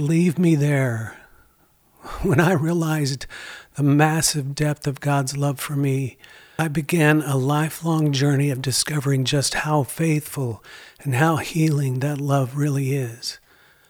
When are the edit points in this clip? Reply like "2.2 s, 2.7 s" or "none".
none